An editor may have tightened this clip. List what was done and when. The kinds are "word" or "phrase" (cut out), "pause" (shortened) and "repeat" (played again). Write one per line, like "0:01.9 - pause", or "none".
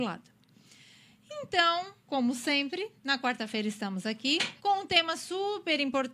0:02.0 - pause
0:03.0 - pause
0:04.6 - pause